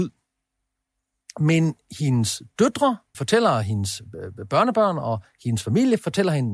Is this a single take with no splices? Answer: no; 1 cut; at 3.1 s

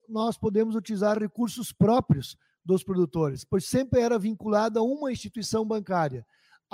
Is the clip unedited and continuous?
yes; 0 cuts

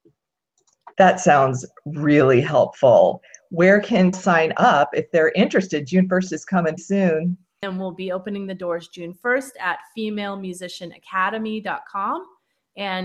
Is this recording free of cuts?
no; 3 cuts; at 0.9 s, 4.1 s, 6.8 s

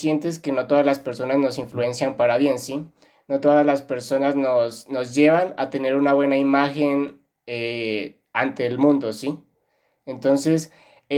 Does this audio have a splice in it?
no; 0 cuts

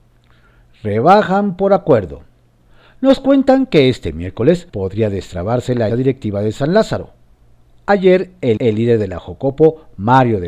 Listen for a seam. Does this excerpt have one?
yes; 3 cuts; at 4.7 s, 5.9 s, 8.6 s

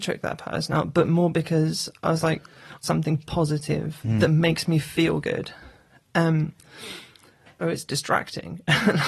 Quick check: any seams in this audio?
yes; 2 cuts; at 2.8 s, 7.6 s

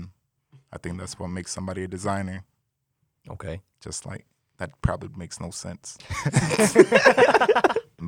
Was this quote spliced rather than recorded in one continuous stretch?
no; 0 cuts

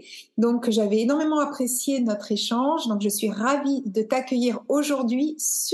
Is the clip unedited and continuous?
yes; 0 cuts

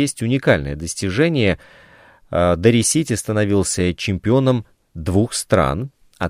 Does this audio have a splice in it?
no; 0 cuts

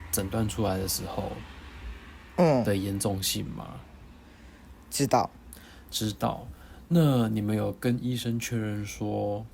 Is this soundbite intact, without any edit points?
yes; 0 cuts

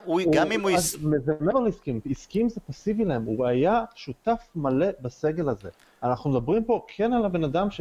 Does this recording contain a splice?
no; 0 cuts

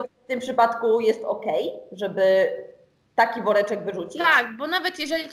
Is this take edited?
no; 0 cuts

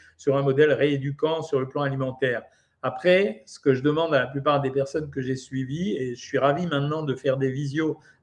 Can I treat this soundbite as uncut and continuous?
yes; 0 cuts

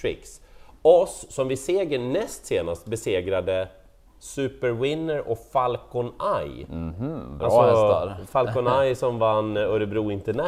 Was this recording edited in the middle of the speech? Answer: no; 0 cuts

